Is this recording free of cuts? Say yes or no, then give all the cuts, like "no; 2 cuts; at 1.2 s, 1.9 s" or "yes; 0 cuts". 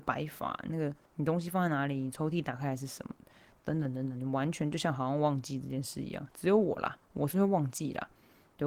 no; 2 cuts; at 1.0 s, 7.0 s